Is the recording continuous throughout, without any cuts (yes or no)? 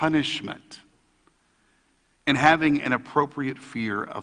yes